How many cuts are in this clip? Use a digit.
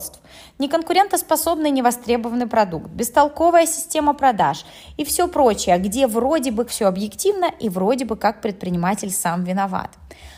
1